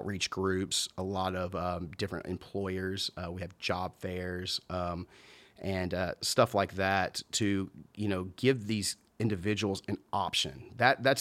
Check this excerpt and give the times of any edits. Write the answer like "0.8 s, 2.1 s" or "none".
none